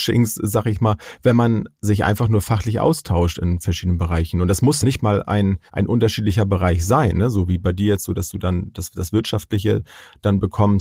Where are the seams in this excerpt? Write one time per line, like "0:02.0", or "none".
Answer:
0:04.8
0:05.7